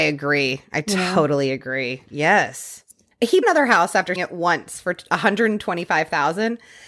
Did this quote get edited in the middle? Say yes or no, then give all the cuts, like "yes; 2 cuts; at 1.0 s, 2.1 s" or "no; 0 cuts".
yes; 2 cuts; at 3.4 s, 4.2 s